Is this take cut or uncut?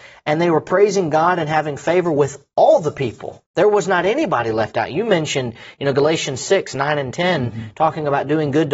cut